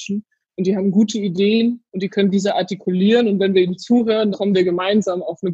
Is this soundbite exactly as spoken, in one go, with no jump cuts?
no; 2 cuts; at 1.9 s, 4.3 s

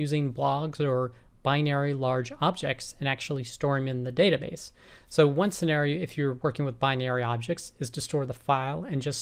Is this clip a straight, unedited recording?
yes; 0 cuts

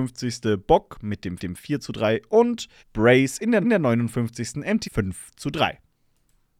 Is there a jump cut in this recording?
yes; 4 cuts; at 1.4 s, 2.8 s, 3.6 s, 4.8 s

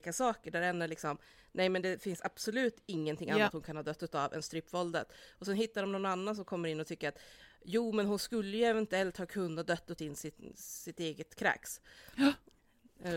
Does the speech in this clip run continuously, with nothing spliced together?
no; 1 cut; at 10.0 s

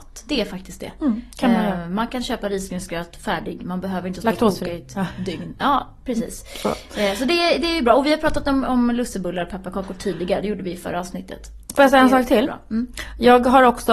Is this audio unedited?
yes; 0 cuts

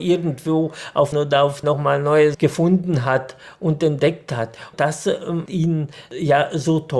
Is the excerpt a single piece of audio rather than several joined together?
no; 4 cuts; at 1.1 s, 1.6 s, 2.3 s, 5.5 s

